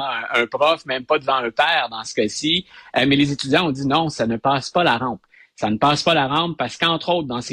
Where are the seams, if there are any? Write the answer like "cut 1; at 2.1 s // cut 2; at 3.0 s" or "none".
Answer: none